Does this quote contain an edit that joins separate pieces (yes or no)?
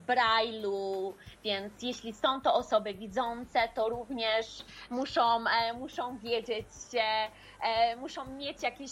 no